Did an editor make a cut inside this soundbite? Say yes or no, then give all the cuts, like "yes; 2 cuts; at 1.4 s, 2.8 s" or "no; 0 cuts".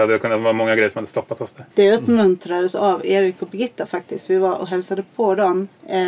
yes; 1 cut; at 1.7 s